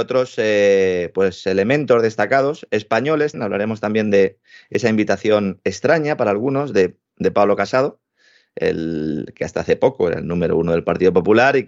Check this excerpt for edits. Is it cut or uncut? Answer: cut